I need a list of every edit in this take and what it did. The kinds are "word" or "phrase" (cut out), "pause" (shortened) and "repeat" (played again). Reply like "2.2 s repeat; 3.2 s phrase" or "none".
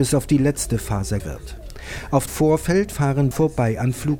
1.2 s word; 2.3 s word; 3.3 s word